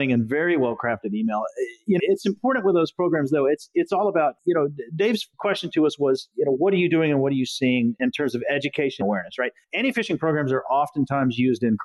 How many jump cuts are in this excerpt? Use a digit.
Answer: 3